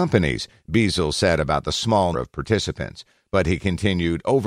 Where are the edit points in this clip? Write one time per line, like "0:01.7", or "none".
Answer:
0:02.1